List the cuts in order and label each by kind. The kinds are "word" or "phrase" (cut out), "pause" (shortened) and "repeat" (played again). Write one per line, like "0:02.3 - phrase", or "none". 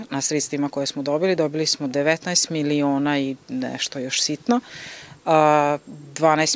none